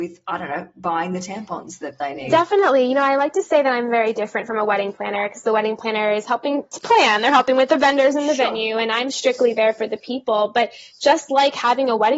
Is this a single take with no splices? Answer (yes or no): yes